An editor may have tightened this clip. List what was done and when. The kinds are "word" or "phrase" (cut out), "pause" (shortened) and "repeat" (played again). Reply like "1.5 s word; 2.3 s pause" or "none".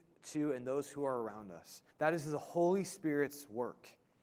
1.9 s pause